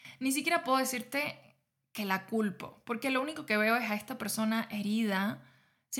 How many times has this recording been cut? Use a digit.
0